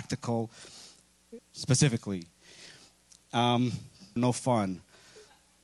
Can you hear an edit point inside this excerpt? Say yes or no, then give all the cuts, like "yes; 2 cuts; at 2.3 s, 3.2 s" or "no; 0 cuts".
yes; 2 cuts; at 1.4 s, 4.2 s